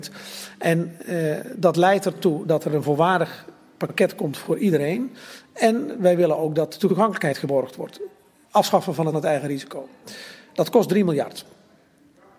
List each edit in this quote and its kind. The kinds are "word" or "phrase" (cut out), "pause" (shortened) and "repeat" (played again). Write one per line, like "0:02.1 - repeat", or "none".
none